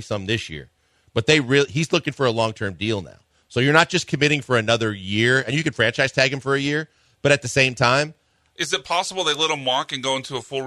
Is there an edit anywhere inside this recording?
no; 0 cuts

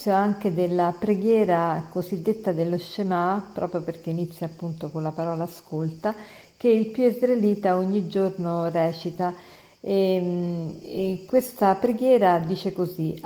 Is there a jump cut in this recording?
no; 0 cuts

